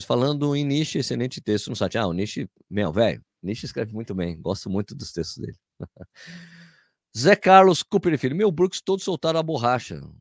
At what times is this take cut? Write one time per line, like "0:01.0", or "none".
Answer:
none